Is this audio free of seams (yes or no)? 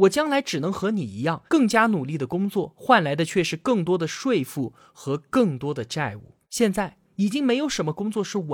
no